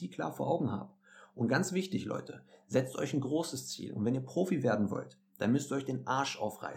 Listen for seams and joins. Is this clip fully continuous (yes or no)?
yes